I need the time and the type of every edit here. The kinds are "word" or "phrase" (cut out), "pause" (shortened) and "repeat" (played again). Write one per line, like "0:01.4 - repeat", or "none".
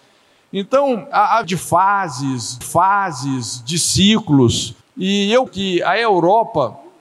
0:01.1 - word
0:01.4 - phrase
0:02.6 - repeat
0:04.8 - pause
0:05.5 - word